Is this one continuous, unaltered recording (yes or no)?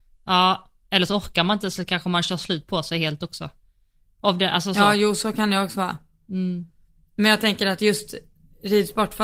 yes